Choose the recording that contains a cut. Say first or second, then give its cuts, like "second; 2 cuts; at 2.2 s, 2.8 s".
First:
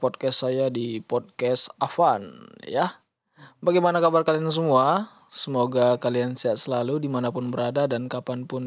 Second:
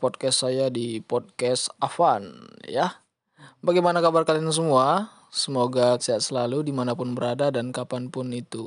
second; 1 cut; at 6.0 s